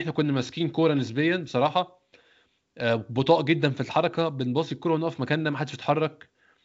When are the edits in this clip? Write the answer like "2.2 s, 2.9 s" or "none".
none